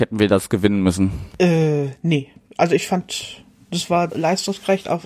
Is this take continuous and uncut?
no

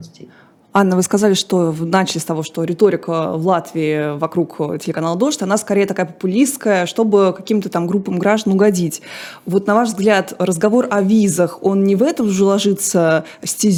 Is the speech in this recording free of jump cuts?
yes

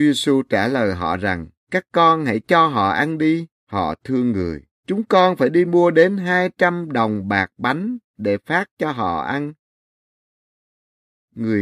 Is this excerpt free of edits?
no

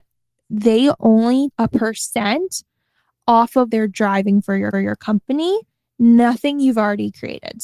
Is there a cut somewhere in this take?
yes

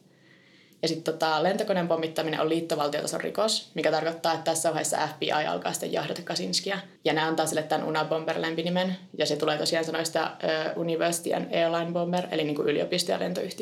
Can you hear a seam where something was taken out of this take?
yes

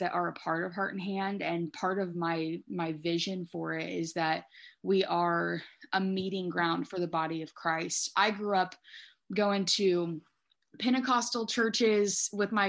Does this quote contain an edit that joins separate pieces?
no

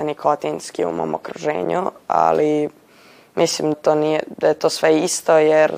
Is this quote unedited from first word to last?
no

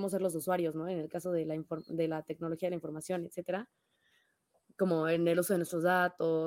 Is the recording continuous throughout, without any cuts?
yes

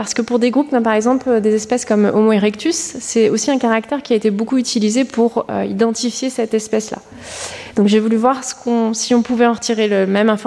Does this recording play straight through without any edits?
yes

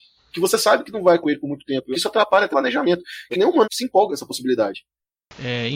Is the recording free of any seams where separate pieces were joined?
no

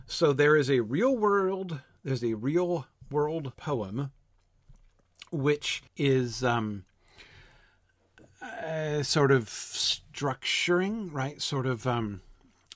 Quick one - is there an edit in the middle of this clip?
yes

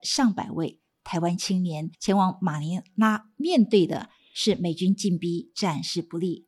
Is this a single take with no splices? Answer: no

